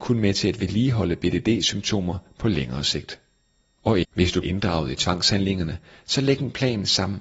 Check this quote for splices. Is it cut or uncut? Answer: cut